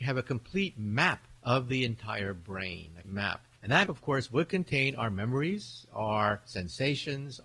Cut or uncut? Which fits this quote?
cut